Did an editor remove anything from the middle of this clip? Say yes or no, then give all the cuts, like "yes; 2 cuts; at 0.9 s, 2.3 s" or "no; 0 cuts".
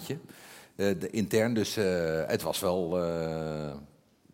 no; 0 cuts